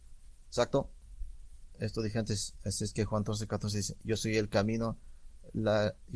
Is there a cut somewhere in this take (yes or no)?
no